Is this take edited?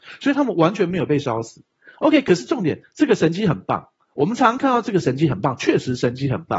no; 0 cuts

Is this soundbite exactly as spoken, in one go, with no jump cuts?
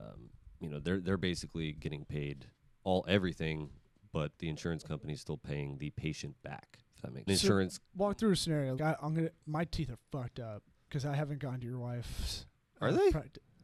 no; 3 cuts; at 2.6 s, 7.3 s, 8.8 s

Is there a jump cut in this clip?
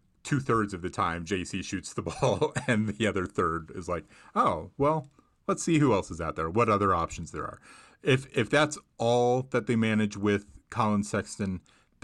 no; 0 cuts

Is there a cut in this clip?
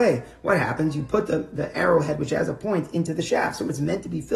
no; 0 cuts

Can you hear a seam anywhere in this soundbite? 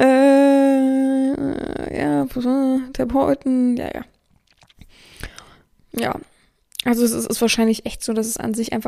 no; 0 cuts

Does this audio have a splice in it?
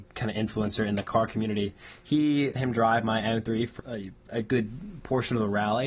yes; 2 cuts; at 2.6 s, 3.8 s

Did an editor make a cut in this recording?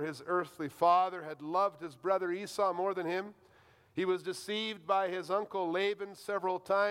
no; 0 cuts

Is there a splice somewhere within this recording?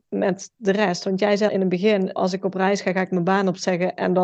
yes; 2 cuts; at 1.5 s, 2.2 s

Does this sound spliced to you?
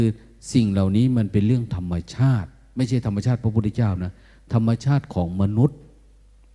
no; 0 cuts

